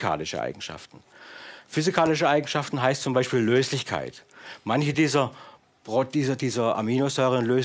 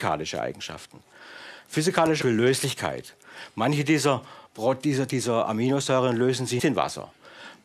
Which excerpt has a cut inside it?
second; 3 cuts; at 2.2 s, 4.5 s, 6.6 s

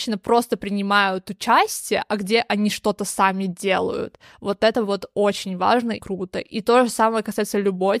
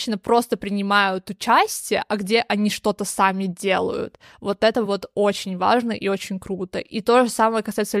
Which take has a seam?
first; 1 cut; at 6.0 s

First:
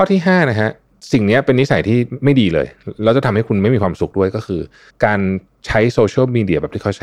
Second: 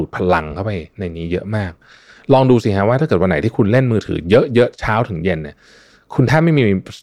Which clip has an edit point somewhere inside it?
first; 1 cut; at 4.9 s

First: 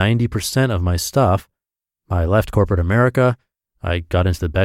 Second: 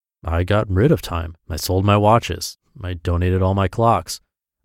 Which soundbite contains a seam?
second; 1 cut; at 1.4 s

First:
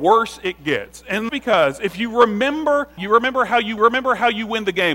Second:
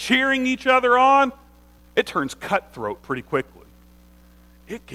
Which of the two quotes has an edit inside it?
first; 3 cuts; at 1.3 s, 3.0 s, 3.8 s

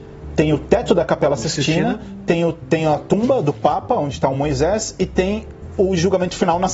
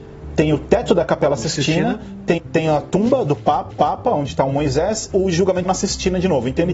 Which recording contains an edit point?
second; 4 cuts; at 2.4 s, 3.7 s, 5.1 s, 5.6 s

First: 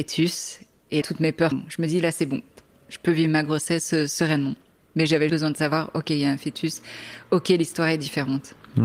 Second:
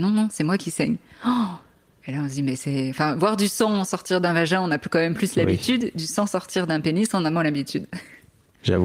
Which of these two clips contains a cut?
first; 3 cuts; at 1.0 s, 1.5 s, 5.3 s

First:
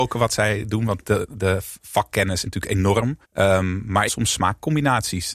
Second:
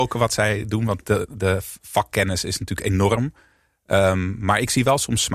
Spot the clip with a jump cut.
first; 3 cuts; at 2.4 s, 3.2 s, 4.1 s

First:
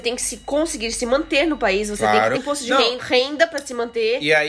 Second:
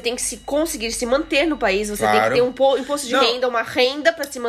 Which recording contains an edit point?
first; 2 cuts; at 2.4 s, 3.0 s

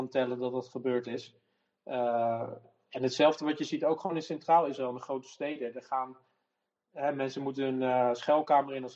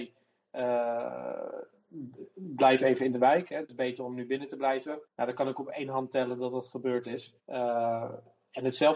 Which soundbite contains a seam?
second; 2 cuts; at 5.1 s, 7.4 s

